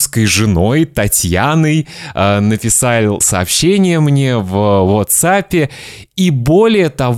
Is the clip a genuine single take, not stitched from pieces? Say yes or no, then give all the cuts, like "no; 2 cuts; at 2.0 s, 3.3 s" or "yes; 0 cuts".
no; 1 cut; at 3.2 s